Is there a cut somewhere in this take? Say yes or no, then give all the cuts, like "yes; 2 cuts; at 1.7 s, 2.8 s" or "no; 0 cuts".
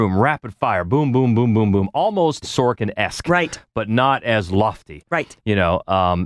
yes; 1 cut; at 2.4 s